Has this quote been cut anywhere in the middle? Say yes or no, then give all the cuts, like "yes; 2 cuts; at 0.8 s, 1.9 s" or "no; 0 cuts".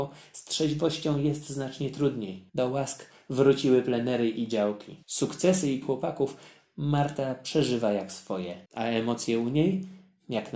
yes; 4 cuts; at 2.5 s, 5.0 s, 5.8 s, 8.7 s